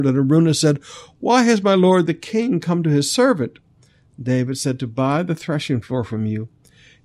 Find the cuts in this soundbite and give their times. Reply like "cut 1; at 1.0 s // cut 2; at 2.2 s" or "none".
none